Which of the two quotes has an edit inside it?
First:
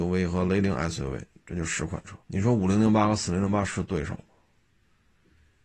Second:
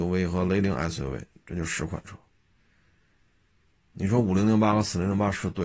first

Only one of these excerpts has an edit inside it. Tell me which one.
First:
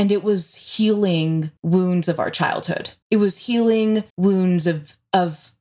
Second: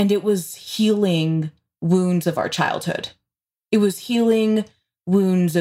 first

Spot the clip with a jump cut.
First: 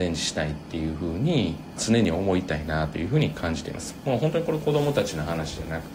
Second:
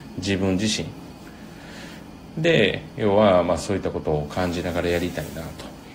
first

